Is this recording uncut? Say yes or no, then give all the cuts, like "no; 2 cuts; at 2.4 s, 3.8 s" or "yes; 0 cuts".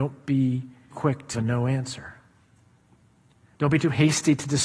no; 2 cuts; at 0.9 s, 1.3 s